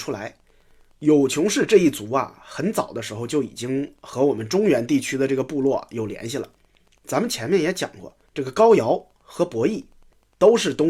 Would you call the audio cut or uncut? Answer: cut